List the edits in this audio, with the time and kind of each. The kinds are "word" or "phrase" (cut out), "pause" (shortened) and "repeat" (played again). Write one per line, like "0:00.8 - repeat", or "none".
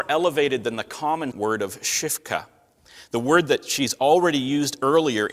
0:01.3 - word